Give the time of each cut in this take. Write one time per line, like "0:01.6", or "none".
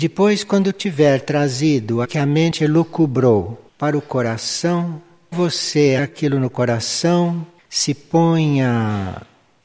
0:02.0
0:03.7
0:05.3
0:06.0
0:07.6